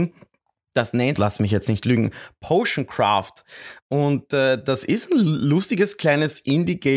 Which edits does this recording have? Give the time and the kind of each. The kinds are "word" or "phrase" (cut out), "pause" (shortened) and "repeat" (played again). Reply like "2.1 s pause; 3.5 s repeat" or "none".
1.2 s phrase